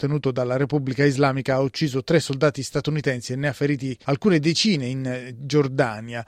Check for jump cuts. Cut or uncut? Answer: cut